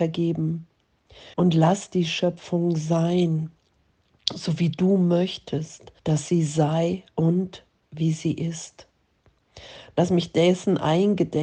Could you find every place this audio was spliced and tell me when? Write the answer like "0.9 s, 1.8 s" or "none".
1.3 s, 6.0 s, 7.1 s